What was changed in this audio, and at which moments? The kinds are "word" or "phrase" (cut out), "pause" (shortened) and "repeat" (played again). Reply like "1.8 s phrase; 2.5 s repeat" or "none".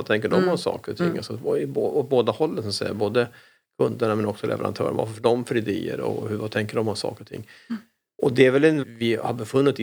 8.8 s word